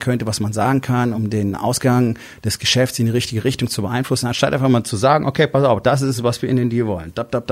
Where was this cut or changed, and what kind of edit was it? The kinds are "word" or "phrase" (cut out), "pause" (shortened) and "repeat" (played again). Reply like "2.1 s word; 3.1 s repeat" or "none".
none